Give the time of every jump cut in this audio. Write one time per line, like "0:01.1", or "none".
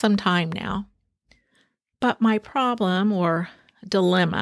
none